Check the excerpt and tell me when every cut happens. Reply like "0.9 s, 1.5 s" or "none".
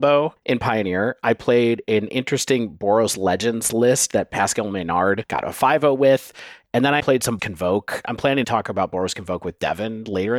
7.0 s, 7.4 s, 8.4 s

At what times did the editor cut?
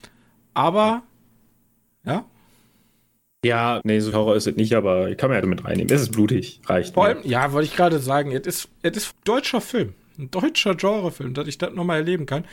3.8 s, 4.1 s, 5.4 s, 9.1 s

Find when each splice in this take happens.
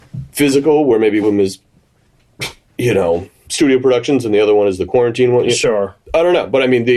1.2 s, 3.5 s

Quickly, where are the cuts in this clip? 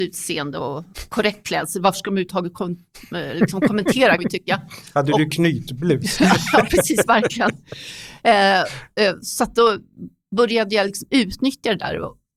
4.2 s

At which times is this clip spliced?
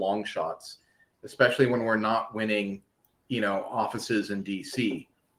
none

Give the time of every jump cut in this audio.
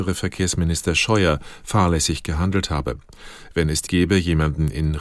3.9 s

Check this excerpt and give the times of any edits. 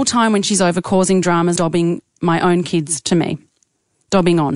1.6 s

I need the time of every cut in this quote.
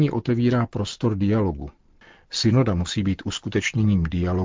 none

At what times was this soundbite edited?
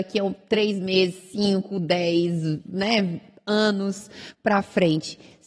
none

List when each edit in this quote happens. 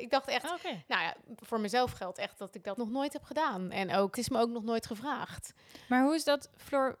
2.8 s, 4.1 s

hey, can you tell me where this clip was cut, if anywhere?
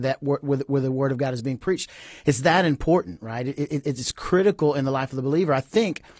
none

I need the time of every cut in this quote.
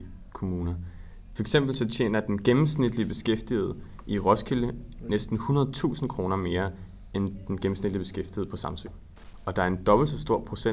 none

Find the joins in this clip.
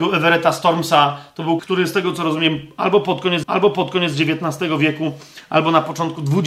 1.6 s, 3.4 s

